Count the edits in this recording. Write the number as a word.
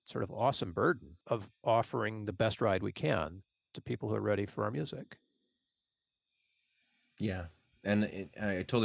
two